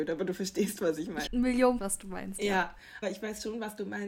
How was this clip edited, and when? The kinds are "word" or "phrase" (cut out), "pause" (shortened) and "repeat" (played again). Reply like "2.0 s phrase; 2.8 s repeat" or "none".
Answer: 1.3 s word; 1.8 s word; 3.0 s word